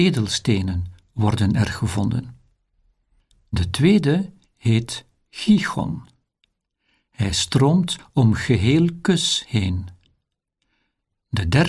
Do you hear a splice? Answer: no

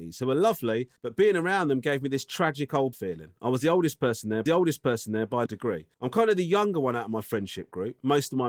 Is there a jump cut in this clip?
yes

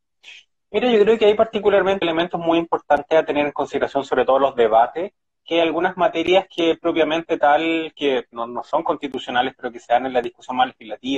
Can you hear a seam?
yes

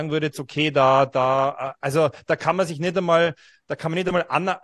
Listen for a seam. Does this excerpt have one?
no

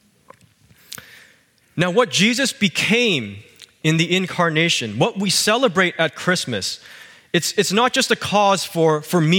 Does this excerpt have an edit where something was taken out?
no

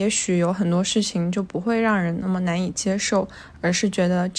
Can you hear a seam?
no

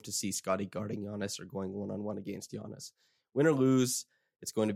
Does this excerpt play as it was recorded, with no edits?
yes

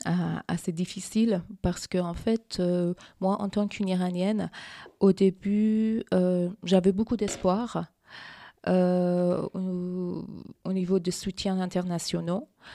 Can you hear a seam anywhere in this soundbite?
yes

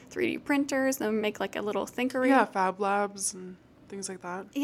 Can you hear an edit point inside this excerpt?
no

